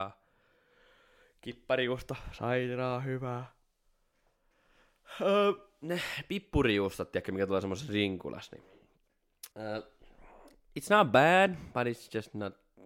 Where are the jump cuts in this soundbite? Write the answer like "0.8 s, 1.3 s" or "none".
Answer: 9.5 s